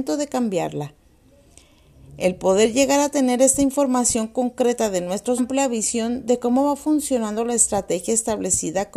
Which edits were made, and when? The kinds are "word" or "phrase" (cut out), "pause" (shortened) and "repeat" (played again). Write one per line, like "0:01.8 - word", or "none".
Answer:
0:05.4 - phrase